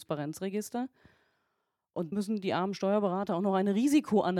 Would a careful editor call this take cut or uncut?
cut